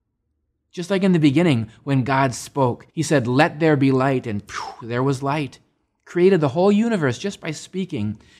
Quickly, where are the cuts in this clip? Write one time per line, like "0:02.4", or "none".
0:02.9